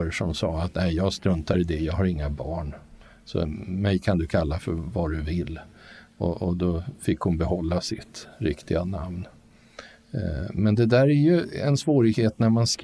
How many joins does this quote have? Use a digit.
0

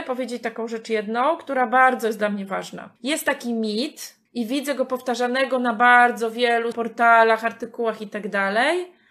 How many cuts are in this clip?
3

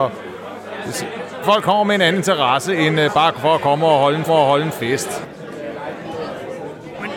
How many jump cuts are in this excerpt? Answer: 2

